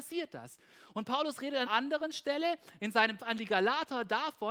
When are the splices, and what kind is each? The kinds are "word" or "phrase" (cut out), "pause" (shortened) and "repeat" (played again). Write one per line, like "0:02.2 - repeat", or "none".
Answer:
0:01.7 - word
0:03.2 - word